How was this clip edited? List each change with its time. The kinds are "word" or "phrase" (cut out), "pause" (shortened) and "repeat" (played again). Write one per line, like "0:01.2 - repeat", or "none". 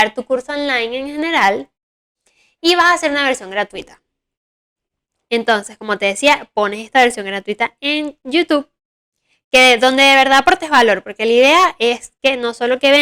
none

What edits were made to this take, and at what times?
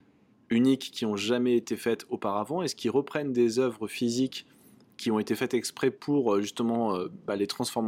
none

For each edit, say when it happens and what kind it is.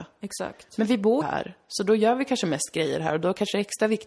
0:01.2 - word

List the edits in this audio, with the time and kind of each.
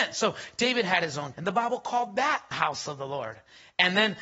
0:01.3 - word
0:02.5 - word

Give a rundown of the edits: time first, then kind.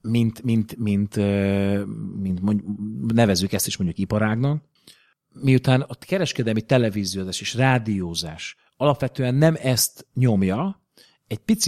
none

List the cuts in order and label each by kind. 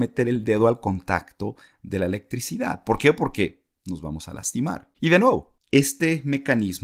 0:04.9 - pause

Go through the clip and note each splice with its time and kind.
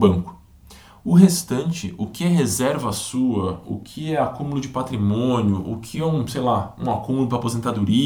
none

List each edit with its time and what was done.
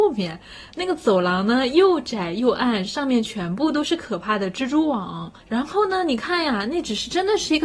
0:05.4 - pause

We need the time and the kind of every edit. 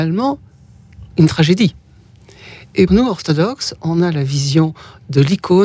0:02.9 - word

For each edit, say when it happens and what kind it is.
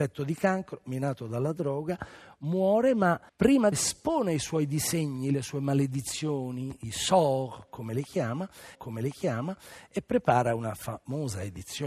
0:03.3 - pause
0:03.7 - word
0:08.7 - repeat

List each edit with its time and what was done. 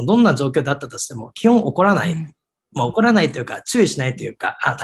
none

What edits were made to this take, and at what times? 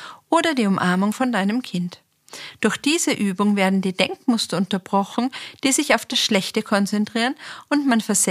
none

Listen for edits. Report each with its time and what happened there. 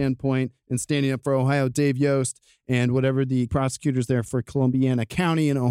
0:03.5 - word

